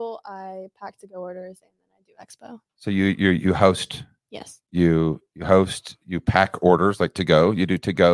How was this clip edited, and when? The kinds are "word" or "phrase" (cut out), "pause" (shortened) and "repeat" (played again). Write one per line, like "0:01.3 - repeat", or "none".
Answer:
0:02.7 - pause
0:04.6 - pause